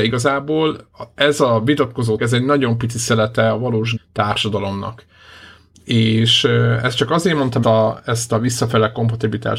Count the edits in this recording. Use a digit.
3